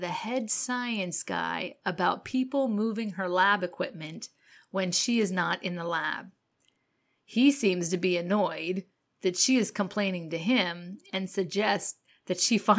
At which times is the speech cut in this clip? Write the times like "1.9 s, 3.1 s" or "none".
none

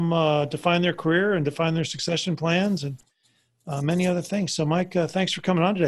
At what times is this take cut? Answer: none

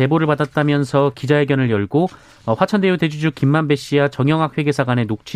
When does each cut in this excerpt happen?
none

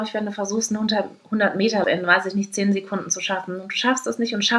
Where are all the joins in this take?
1.8 s

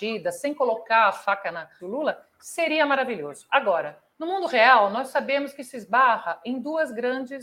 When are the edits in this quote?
1.8 s, 4.1 s

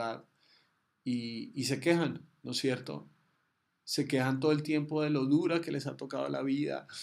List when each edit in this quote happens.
none

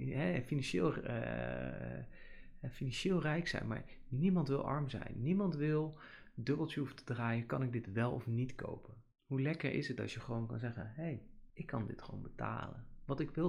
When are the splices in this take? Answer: 9.1 s, 11.5 s

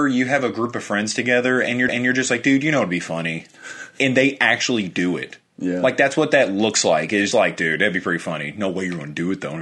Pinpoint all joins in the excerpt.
1.9 s, 7.3 s

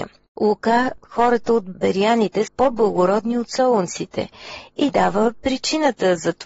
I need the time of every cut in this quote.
1.0 s, 1.7 s, 2.5 s, 4.9 s

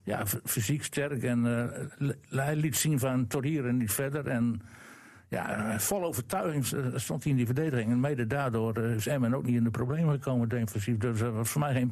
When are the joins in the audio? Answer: none

